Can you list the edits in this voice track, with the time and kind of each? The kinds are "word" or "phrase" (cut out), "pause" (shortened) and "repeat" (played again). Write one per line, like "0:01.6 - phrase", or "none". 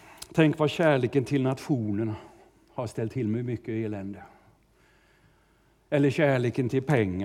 none